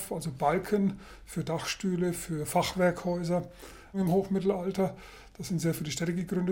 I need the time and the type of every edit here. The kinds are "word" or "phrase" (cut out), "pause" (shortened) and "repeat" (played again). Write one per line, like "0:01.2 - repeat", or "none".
none